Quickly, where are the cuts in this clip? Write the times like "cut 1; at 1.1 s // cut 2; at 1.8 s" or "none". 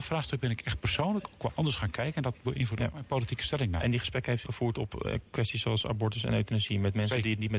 cut 1; at 4.4 s